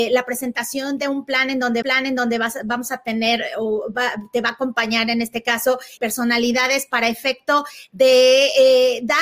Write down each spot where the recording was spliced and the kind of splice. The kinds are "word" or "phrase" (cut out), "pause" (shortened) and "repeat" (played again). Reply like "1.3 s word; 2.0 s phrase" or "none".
1.8 s repeat; 6.0 s word